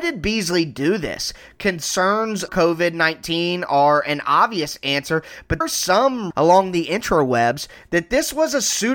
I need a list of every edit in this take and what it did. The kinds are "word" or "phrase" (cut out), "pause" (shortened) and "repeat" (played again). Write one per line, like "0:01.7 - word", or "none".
0:02.5 - word
0:05.6 - word
0:06.3 - word